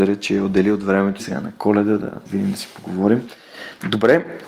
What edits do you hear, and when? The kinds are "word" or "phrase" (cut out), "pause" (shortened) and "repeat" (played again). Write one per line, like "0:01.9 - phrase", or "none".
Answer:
0:01.2 - phrase
0:02.3 - word